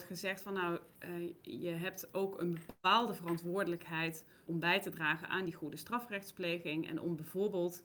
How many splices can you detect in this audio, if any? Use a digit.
2